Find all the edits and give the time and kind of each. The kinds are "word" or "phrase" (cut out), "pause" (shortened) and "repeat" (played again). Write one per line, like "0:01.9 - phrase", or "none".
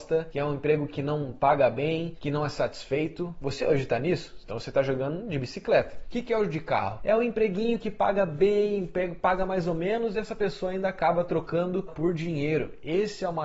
0:11.9 - phrase